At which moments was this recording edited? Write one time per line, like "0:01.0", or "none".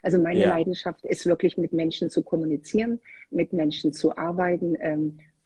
none